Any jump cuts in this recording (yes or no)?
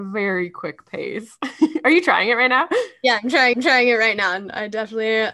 yes